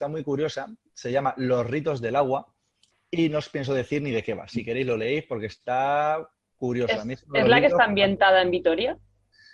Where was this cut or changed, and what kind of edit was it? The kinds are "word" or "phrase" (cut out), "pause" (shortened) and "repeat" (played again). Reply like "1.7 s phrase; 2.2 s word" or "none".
none